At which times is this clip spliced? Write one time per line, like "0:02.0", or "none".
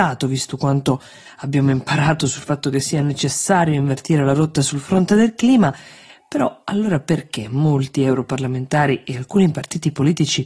none

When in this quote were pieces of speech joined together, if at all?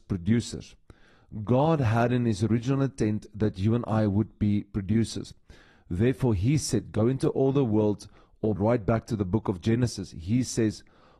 0:08.6

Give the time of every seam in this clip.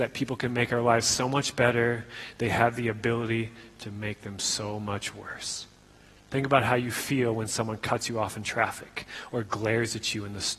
none

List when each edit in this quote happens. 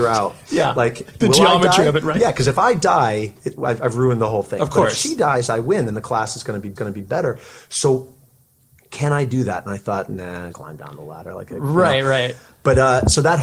0:06.8
0:10.5

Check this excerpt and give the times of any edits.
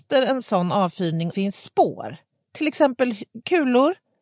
0:01.3

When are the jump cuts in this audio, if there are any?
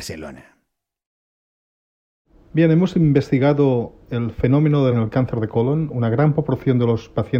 0:04.9

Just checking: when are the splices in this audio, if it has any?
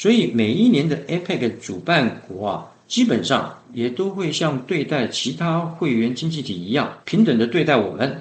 0:07.0

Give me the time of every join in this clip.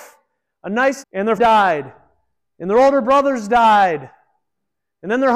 0:01.0
0:01.4

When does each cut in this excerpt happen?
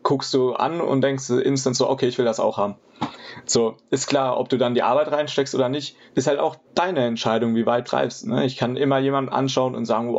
0:06.1
0:06.6
0:07.8

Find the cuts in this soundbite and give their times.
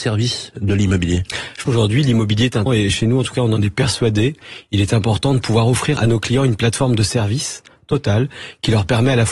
0:01.6
0:02.7
0:06.0

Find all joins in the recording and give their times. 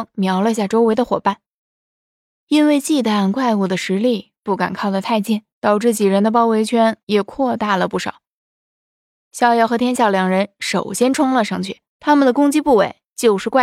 0:05.5
0:07.0
0:11.9

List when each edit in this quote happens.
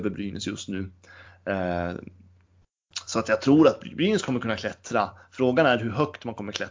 none

